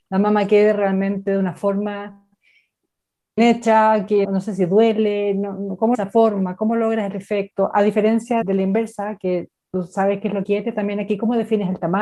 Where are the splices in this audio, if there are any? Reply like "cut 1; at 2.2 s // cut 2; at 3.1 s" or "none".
cut 1; at 3.4 s // cut 2; at 4.2 s // cut 3; at 5.9 s // cut 4; at 8.4 s // cut 5; at 10.4 s